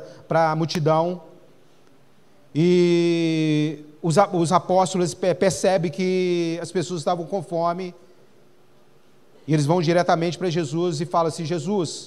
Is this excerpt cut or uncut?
uncut